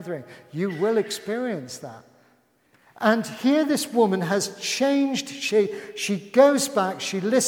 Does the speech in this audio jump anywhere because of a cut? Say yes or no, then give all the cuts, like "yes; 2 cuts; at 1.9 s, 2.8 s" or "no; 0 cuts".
no; 0 cuts